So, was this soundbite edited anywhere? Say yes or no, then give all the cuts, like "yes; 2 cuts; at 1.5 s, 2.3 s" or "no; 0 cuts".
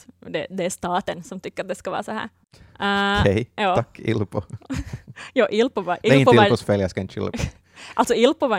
no; 0 cuts